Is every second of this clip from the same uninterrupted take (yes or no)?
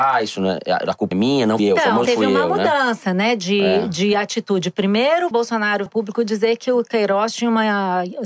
no